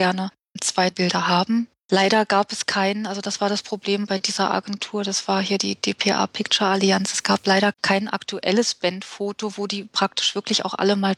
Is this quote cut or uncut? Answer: cut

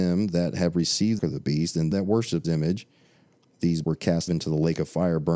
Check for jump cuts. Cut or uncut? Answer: cut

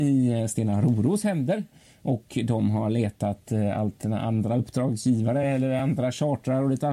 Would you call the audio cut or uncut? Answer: uncut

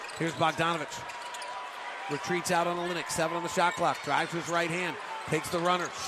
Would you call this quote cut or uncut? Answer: uncut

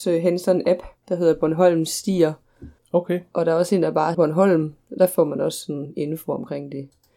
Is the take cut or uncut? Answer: cut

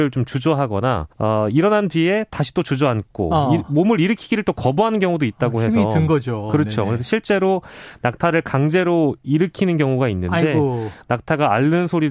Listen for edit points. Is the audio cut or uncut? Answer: cut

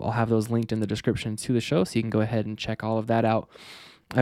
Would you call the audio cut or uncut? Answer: uncut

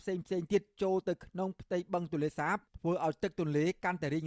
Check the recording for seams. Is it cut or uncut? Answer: cut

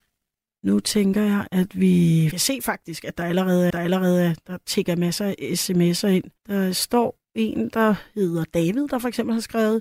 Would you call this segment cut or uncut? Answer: cut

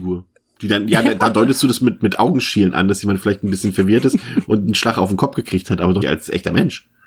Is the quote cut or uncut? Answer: cut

